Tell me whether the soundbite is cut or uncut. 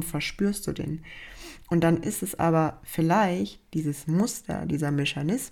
uncut